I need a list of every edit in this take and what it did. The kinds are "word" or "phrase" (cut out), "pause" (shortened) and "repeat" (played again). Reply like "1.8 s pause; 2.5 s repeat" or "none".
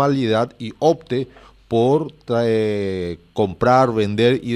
none